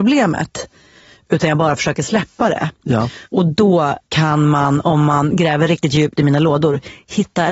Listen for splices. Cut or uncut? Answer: cut